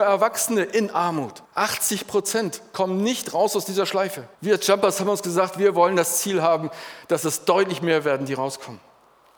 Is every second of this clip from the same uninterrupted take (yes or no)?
no